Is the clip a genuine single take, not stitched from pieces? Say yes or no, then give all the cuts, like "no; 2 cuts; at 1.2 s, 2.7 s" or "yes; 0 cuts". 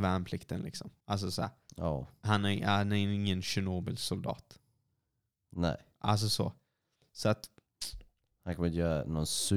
no; 1 cut; at 1.0 s